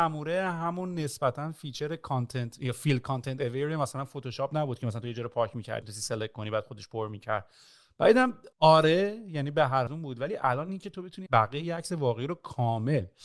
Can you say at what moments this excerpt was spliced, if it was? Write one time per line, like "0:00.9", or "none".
0:05.8
0:08.5
0:09.9
0:11.3